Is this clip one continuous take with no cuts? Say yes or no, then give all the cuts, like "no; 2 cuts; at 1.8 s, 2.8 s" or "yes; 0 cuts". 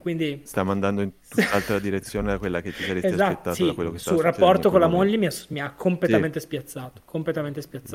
yes; 0 cuts